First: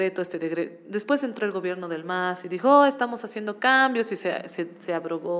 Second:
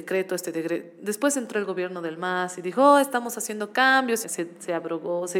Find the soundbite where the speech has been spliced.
second; 1 cut; at 4.2 s

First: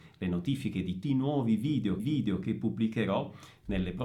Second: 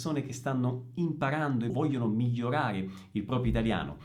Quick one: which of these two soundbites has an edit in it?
first; 2 cuts; at 1.0 s, 2.0 s

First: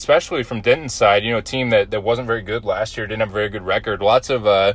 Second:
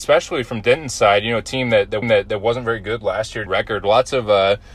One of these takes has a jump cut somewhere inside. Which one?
second; 2 cuts; at 2.0 s, 3.5 s

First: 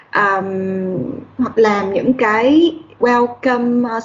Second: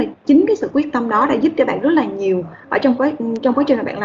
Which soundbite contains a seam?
first; 2 cuts; at 1.5 s, 3.0 s

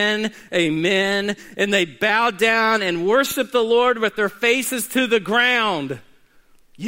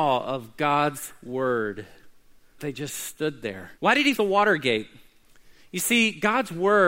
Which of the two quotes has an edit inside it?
second; 3 cuts; at 2.6 s, 3.8 s, 4.2 s

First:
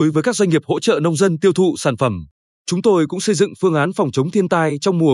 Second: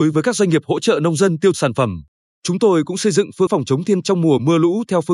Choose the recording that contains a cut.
second; 3 cuts; at 1.5 s, 3.5 s, 4.0 s

